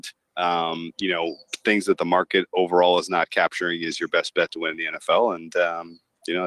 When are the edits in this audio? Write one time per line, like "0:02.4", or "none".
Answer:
none